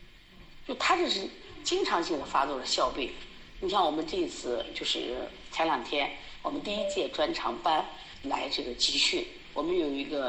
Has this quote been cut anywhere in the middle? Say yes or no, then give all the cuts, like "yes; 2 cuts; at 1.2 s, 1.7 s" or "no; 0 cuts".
no; 0 cuts